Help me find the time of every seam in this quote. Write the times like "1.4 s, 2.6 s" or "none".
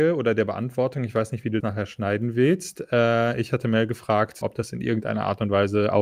1.6 s, 4.4 s